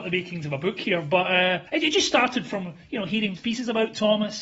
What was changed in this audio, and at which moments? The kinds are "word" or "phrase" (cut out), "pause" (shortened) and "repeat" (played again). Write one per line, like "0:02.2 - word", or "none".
0:01.7 - pause
0:03.4 - word